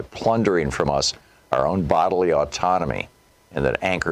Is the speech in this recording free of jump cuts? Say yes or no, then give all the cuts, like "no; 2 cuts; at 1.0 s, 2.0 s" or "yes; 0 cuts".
yes; 0 cuts